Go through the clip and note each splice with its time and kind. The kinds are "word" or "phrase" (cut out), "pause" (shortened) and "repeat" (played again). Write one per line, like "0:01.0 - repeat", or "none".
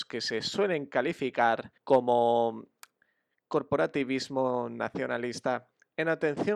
0:01.8 - pause

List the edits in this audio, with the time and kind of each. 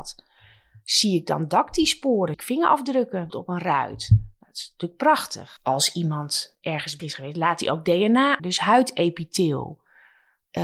0:02.3 - word
0:03.3 - word
0:07.0 - word
0:08.4 - word

